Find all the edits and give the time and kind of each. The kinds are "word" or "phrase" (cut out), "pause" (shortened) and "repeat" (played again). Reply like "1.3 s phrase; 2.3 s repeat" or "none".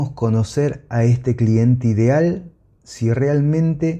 none